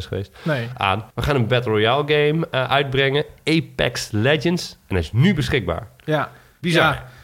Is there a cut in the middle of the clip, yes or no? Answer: yes